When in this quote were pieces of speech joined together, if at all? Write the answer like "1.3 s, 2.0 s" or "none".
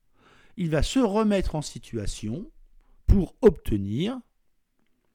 none